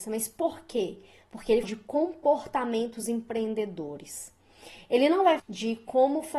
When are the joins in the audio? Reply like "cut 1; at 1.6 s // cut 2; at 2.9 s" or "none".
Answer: cut 1; at 1.6 s // cut 2; at 5.4 s